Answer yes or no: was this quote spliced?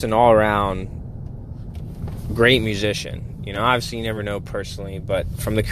no